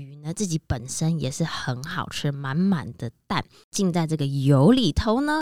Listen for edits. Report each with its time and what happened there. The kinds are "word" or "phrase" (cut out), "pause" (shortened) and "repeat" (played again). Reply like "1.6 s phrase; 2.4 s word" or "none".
none